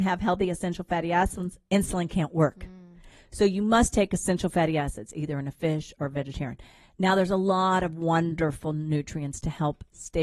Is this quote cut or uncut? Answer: uncut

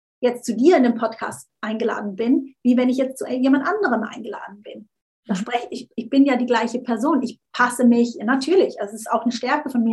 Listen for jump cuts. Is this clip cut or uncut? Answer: uncut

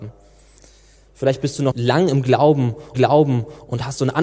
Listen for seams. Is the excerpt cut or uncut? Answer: cut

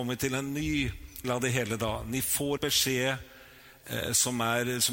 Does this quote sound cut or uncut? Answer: cut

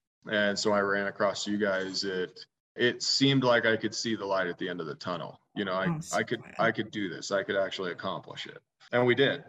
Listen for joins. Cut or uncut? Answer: uncut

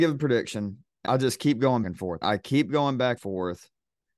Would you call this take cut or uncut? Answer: cut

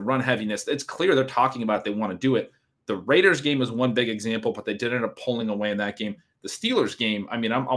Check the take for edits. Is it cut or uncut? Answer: uncut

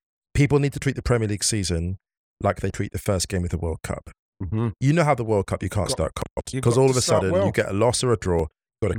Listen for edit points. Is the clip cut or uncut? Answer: uncut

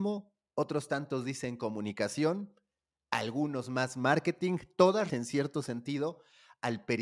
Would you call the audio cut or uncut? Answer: cut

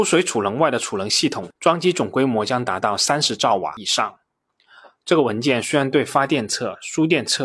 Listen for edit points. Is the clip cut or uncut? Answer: uncut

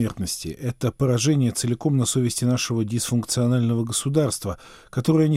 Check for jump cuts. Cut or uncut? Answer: uncut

